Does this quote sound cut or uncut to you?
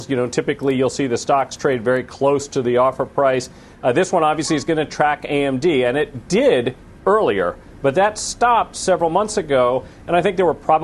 uncut